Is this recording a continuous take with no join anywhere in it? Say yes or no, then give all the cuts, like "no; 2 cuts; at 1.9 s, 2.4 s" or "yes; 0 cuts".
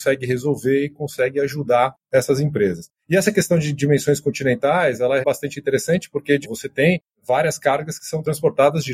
no; 2 cuts; at 5.2 s, 6.4 s